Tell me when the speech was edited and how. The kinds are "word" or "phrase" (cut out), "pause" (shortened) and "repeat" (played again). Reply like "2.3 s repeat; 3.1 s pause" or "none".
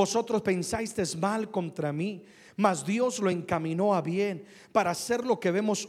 none